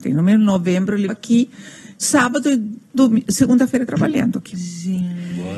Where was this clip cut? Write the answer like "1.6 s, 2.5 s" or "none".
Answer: 1.1 s, 2.0 s, 3.9 s